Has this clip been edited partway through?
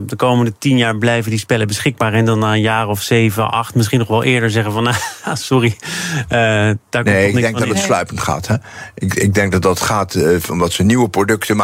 no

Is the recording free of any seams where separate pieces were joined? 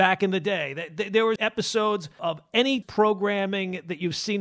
no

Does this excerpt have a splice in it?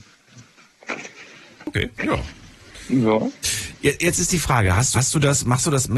yes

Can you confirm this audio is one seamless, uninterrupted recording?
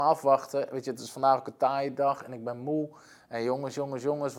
yes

